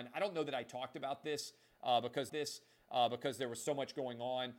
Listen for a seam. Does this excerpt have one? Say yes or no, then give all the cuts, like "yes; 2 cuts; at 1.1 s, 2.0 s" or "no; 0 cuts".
yes; 1 cut; at 2.3 s